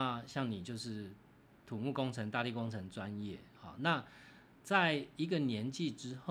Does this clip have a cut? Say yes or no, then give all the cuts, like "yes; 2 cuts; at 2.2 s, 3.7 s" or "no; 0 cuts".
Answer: no; 0 cuts